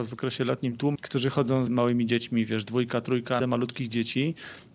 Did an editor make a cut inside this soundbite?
yes; 3 cuts; at 0.9 s, 1.7 s, 3.4 s

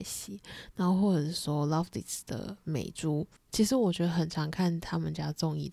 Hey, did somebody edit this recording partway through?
yes; 1 cut; at 3.4 s

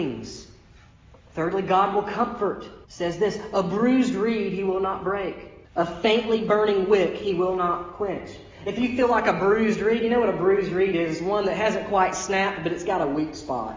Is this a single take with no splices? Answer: no; 2 cuts; at 2.8 s, 5.7 s

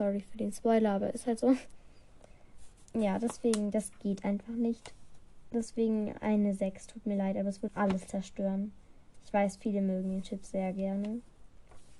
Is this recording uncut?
no; 1 cut; at 7.7 s

